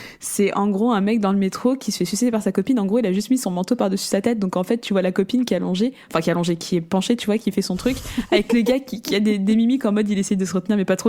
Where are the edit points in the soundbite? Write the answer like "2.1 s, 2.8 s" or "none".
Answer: none